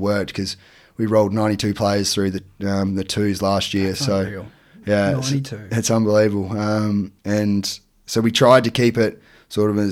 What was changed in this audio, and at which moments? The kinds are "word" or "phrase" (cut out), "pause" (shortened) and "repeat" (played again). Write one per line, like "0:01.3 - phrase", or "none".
0:07.2 - pause